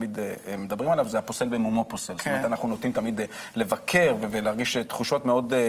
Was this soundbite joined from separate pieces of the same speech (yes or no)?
no